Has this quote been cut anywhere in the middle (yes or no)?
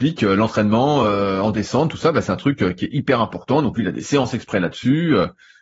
no